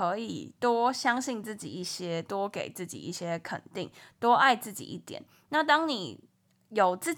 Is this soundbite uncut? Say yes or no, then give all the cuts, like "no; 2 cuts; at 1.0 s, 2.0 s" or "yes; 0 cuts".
yes; 0 cuts